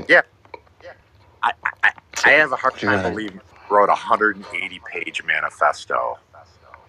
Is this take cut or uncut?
uncut